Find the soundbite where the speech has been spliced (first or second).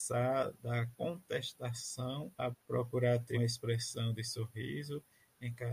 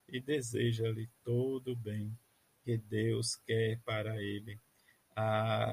first